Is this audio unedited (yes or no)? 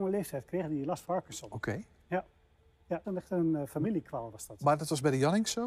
no